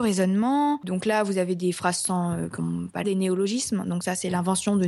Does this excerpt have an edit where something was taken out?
yes; 1 cut; at 3.0 s

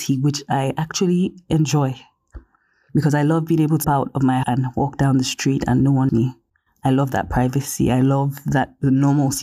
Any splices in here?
yes; 3 cuts; at 3.8 s, 4.4 s, 6.1 s

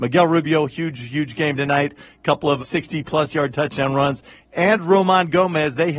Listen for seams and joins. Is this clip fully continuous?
no; 1 cut; at 2.6 s

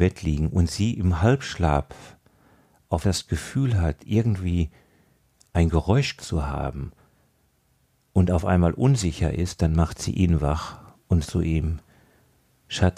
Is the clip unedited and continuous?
no; 3 cuts; at 3.0 s, 6.2 s, 11.2 s

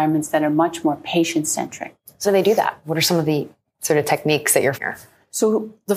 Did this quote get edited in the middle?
yes; 2 cuts; at 2.2 s, 4.7 s

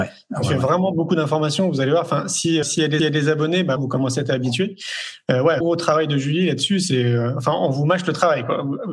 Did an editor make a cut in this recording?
yes; 4 cuts; at 2.6 s, 3.0 s, 3.8 s, 5.6 s

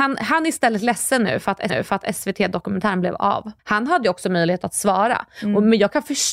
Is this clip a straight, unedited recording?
no; 2 cuts; at 1.7 s, 3.6 s

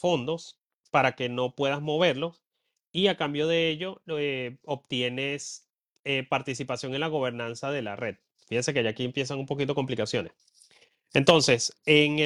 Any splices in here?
no; 0 cuts

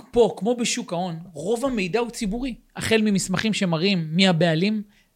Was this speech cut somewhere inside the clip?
no; 0 cuts

